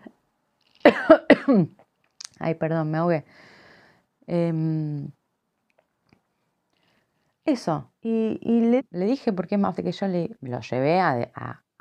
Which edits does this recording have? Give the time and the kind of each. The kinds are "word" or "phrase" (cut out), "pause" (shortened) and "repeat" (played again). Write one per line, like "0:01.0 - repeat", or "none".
0:08.0 - pause
0:08.8 - word
0:09.8 - word